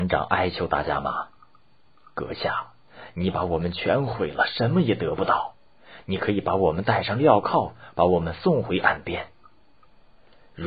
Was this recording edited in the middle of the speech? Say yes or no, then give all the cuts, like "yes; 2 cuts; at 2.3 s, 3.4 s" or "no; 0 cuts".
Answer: no; 0 cuts